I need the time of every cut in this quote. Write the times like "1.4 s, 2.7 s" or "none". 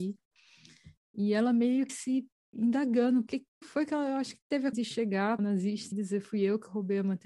1.9 s, 3.3 s, 3.6 s, 4.7 s, 5.4 s, 5.9 s